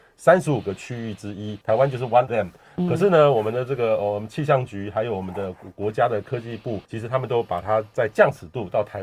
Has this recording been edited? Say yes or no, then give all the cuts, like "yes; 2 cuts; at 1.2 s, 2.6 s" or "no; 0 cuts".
yes; 3 cuts; at 1.6 s, 2.3 s, 6.8 s